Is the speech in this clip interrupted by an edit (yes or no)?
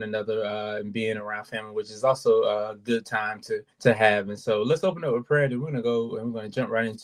yes